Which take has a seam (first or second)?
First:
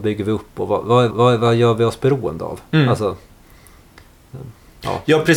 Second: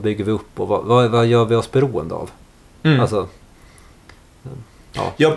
first